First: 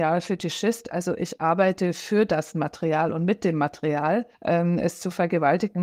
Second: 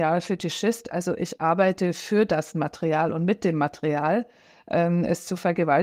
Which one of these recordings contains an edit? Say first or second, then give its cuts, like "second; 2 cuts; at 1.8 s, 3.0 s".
first; 1 cut; at 4.3 s